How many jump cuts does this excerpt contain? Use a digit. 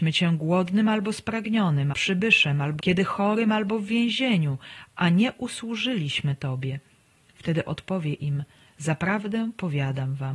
2